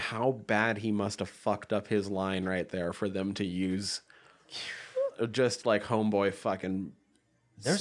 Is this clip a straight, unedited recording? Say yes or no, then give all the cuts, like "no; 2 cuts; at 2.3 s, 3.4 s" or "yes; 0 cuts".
yes; 0 cuts